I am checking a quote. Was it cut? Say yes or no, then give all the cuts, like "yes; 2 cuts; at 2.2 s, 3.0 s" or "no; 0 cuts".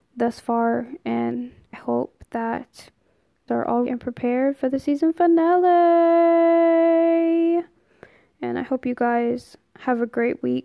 yes; 3 cuts; at 1.7 s, 3.5 s, 3.9 s